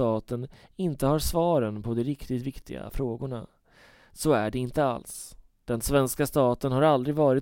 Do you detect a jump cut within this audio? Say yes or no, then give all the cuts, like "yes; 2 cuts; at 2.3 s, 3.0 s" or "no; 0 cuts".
no; 0 cuts